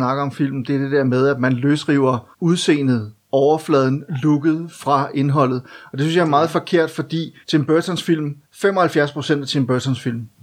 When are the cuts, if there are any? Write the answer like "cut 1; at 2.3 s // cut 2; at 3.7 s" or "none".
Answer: cut 1; at 2.3 s // cut 2; at 7.4 s // cut 3; at 8.4 s